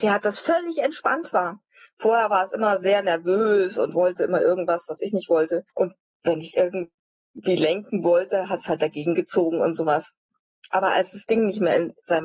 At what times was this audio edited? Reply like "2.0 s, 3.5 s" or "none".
none